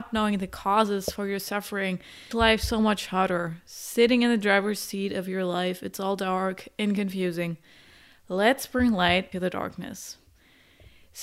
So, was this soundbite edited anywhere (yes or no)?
yes